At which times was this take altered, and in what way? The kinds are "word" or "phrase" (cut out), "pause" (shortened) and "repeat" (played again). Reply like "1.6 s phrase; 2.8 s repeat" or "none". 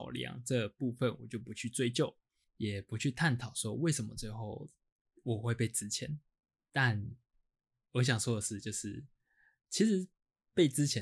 none